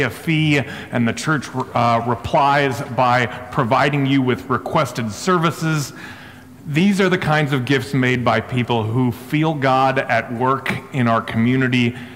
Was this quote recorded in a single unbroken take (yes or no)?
yes